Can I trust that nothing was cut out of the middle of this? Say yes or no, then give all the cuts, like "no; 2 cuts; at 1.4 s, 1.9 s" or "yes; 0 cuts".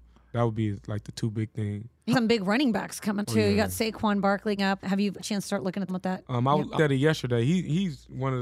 no; 6 cuts; at 2.1 s, 3.2 s, 4.6 s, 5.2 s, 5.9 s, 6.7 s